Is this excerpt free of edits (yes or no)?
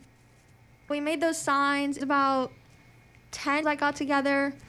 no